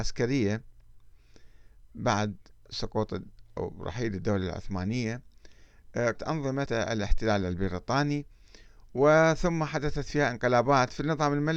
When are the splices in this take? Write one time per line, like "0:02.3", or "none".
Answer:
0:06.1
0:06.7